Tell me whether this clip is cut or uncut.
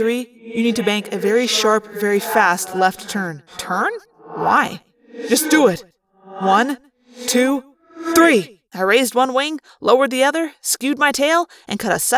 cut